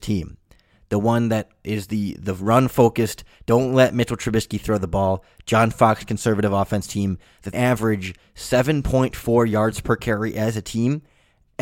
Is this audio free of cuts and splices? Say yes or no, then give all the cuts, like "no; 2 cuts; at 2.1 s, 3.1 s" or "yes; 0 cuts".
no; 1 cut; at 7.5 s